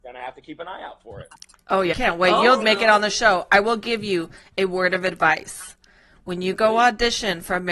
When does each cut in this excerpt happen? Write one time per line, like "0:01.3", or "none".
0:01.9
0:02.6